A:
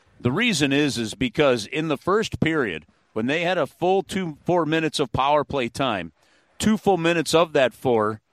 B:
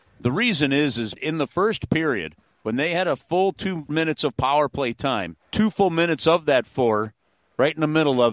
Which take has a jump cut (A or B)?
B